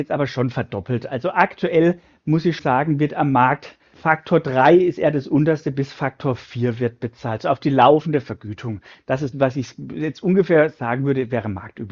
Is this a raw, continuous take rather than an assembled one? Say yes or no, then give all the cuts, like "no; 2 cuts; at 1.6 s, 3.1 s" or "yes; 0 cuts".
no; 3 cuts; at 2.6 s, 3.9 s, 9.3 s